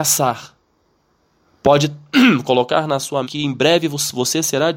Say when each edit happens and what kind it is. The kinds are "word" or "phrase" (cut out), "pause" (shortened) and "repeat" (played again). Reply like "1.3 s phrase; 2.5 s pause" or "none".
3.2 s word